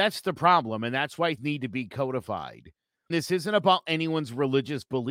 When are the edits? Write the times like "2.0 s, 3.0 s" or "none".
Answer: 1.4 s, 3.1 s